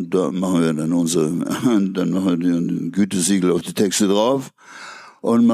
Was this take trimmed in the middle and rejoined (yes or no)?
no